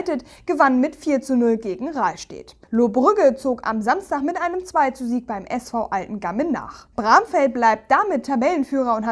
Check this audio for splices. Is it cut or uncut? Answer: cut